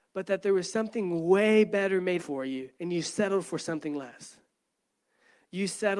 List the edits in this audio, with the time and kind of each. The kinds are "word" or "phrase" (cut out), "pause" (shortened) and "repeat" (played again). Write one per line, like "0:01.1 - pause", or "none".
0:02.2 - word
0:02.7 - pause